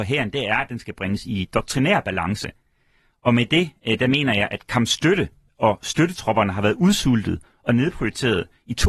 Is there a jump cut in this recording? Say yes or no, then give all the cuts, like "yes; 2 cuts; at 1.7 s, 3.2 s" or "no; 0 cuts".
no; 0 cuts